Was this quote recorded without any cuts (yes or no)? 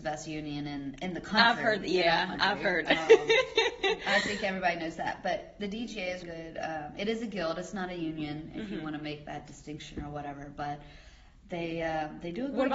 no